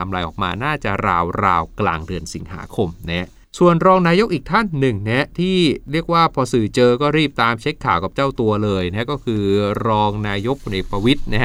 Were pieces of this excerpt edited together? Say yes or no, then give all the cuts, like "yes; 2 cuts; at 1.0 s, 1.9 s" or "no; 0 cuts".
yes; 1 cut; at 3.4 s